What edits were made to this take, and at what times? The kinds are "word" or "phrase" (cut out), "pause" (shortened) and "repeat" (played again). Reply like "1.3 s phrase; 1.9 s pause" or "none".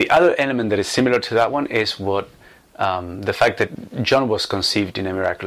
none